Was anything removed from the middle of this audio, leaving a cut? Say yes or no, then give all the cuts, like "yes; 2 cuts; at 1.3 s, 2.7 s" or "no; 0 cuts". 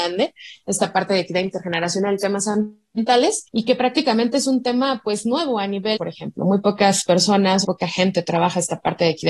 yes; 3 cuts; at 3.5 s, 6.0 s, 7.6 s